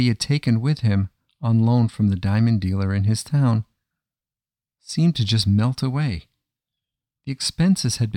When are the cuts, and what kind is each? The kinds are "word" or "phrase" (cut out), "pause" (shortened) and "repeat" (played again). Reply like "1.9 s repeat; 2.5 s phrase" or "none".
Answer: none